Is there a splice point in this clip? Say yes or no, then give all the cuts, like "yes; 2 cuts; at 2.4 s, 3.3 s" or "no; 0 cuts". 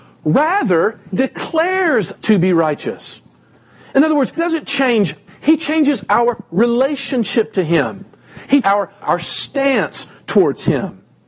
yes; 6 cuts; at 1.1 s, 2.2 s, 4.4 s, 5.3 s, 8.6 s, 9.0 s